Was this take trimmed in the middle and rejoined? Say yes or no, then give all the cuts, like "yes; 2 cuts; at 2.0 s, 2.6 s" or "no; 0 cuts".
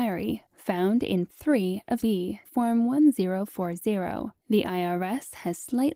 yes; 4 cuts; at 1.3 s, 2.0 s, 2.5 s, 4.4 s